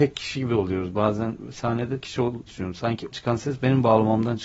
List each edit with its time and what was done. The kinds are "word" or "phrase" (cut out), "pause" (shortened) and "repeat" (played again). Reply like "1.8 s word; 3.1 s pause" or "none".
2.0 s word; 2.5 s word; 3.1 s word